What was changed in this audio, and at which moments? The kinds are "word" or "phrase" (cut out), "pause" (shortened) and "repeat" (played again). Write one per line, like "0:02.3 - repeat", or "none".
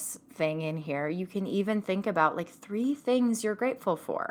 none